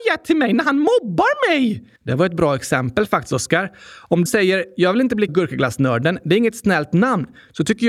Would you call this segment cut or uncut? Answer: cut